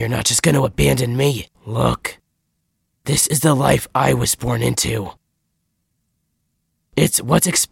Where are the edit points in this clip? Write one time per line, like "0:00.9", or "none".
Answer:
0:01.5